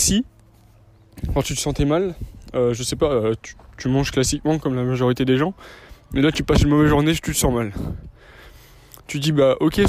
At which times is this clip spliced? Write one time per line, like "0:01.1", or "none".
none